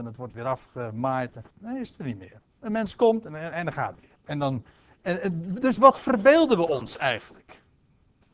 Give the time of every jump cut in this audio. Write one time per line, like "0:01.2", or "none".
0:01.5
0:03.5
0:04.2